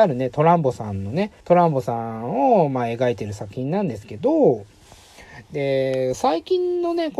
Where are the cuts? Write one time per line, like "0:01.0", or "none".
0:01.4